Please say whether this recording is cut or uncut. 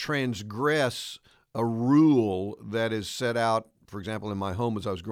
uncut